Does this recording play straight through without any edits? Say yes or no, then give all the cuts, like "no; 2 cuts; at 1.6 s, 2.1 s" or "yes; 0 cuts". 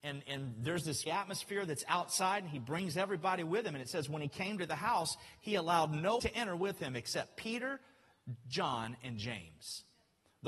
no; 2 cuts; at 1.1 s, 6.2 s